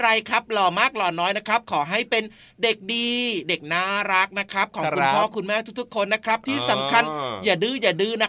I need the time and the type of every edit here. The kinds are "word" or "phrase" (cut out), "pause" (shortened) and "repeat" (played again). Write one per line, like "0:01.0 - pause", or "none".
none